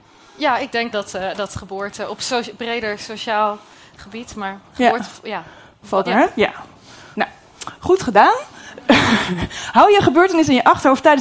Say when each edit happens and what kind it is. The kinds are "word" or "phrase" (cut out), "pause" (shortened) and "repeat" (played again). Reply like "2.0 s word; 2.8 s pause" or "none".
0.9 s word; 6.0 s word; 7.1 s word